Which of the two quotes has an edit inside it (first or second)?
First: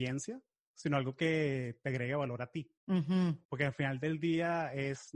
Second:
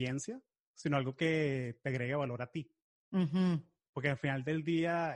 first